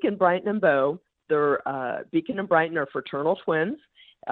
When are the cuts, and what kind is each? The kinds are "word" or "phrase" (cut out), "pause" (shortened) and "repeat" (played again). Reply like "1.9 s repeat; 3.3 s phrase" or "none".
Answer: none

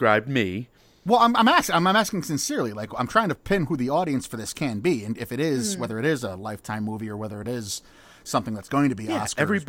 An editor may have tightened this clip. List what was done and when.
none

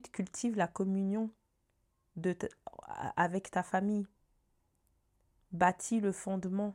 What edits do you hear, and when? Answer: none

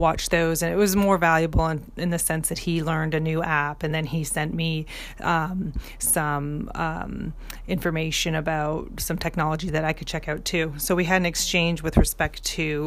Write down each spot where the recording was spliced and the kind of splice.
none

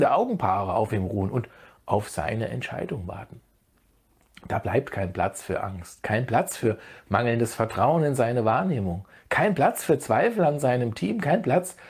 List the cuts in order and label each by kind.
none

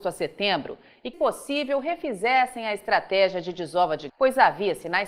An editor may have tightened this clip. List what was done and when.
1.1 s word; 4.1 s word

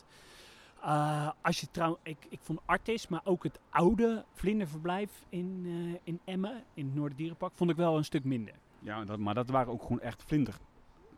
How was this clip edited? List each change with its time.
none

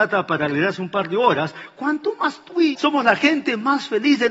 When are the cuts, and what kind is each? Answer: 2.7 s word

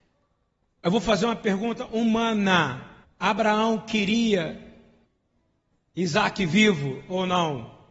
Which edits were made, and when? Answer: 3.0 s pause; 5.0 s pause

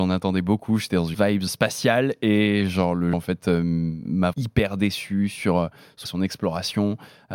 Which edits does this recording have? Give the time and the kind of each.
1.1 s word; 1.5 s word; 3.1 s word; 4.3 s word; 6.1 s word

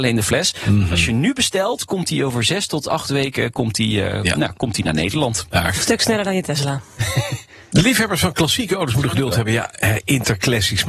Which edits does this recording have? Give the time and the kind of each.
none

